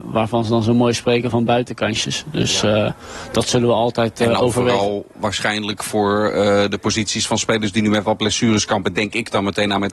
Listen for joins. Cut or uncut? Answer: uncut